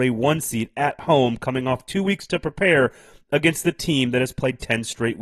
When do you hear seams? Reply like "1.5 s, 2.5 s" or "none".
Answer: none